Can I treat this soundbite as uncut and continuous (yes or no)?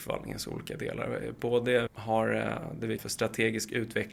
no